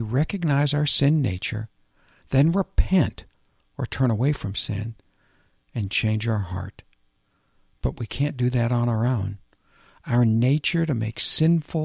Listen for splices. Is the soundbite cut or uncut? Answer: uncut